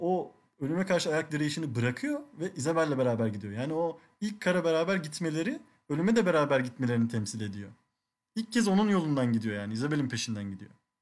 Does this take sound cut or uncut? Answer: uncut